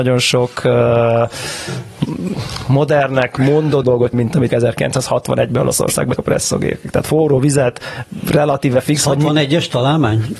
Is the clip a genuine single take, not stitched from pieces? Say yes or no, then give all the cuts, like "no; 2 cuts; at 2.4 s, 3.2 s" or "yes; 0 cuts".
no; 4 cuts; at 3.8 s, 4.1 s, 4.5 s, 6.2 s